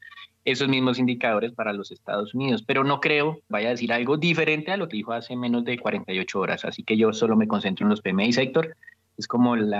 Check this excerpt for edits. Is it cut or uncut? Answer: cut